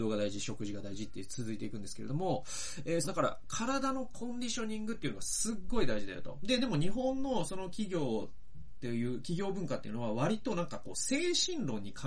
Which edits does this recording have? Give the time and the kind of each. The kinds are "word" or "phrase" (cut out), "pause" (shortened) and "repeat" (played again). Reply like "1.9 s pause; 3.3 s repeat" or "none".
3.0 s phrase